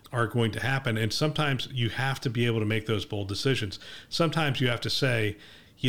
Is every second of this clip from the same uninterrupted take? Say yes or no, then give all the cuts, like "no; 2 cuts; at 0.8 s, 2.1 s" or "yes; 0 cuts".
yes; 0 cuts